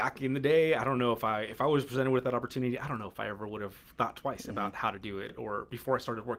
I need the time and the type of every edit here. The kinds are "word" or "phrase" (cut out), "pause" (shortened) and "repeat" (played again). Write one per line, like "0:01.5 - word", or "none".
none